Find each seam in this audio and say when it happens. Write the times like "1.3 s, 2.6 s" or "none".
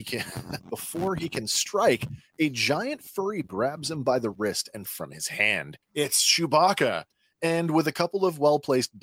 3.4 s, 4.9 s, 5.8 s